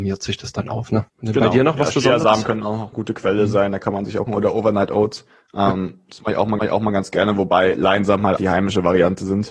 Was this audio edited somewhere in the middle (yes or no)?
yes